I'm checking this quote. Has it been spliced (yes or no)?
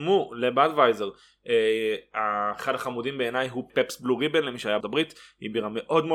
yes